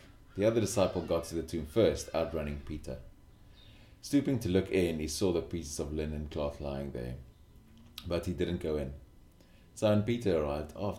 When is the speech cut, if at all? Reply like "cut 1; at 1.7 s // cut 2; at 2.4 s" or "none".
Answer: none